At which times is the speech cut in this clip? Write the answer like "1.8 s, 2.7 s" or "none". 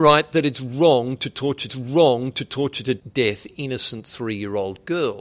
1.7 s